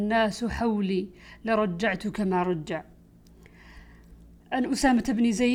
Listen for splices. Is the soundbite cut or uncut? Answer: uncut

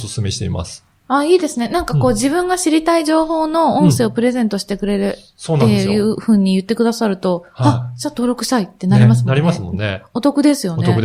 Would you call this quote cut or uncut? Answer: uncut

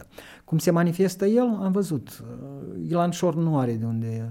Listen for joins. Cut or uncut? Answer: uncut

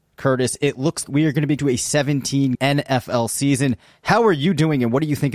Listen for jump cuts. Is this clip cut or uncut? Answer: cut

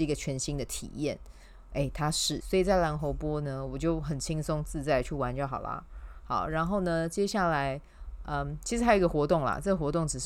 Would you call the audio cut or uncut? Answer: cut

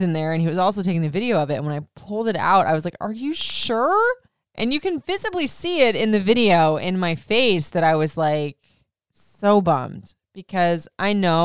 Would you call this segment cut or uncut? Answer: cut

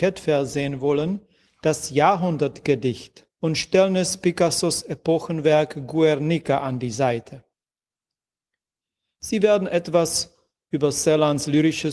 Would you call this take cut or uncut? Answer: cut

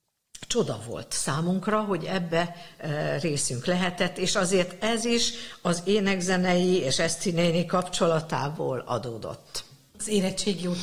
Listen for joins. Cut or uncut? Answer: uncut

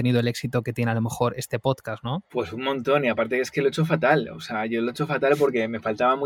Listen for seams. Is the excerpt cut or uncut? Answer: cut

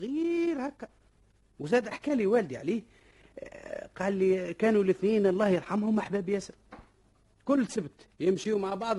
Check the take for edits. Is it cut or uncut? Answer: uncut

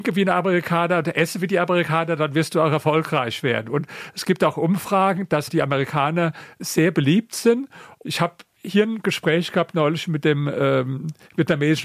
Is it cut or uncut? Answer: cut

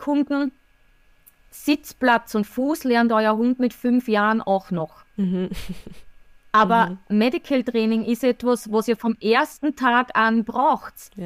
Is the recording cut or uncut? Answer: uncut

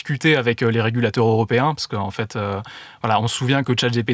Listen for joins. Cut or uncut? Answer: uncut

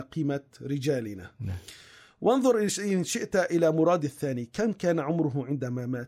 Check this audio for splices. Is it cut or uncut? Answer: uncut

